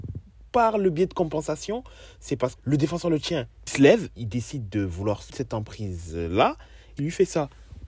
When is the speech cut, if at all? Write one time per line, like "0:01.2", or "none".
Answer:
0:02.6
0:03.7
0:04.2
0:05.3
0:07.0